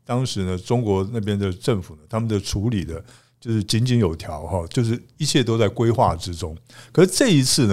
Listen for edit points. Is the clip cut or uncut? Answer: uncut